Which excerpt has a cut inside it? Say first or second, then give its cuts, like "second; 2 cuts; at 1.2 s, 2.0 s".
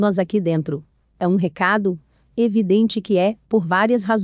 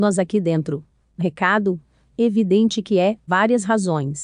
second; 2 cuts; at 1.2 s, 3.3 s